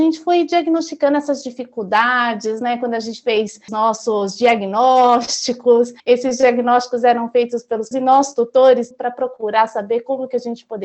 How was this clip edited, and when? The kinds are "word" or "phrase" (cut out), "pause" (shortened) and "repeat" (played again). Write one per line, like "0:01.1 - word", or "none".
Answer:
0:03.7 - word
0:06.0 - pause
0:07.9 - word
0:08.9 - word

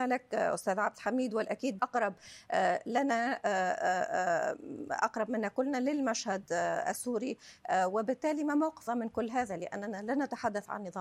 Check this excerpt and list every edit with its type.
0:01.8 - word
0:08.9 - word

